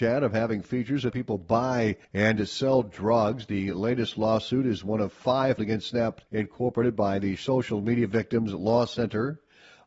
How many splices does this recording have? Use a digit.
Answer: 4